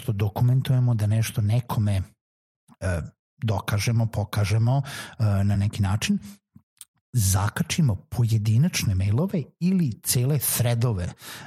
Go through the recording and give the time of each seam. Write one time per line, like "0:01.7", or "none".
none